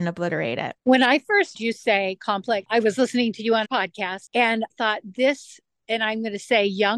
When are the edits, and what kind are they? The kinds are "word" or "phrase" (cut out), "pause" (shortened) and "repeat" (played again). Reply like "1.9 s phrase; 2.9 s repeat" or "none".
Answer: 1.5 s word; 2.6 s word; 3.6 s word; 4.7 s word